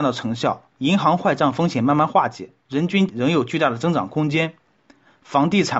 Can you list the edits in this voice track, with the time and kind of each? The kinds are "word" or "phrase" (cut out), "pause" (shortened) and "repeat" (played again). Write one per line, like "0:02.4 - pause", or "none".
0:02.6 - pause
0:03.1 - word